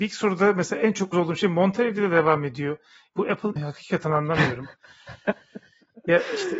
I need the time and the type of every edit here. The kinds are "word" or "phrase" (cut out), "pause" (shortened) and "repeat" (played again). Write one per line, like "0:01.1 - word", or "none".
0:01.1 - word
0:03.6 - word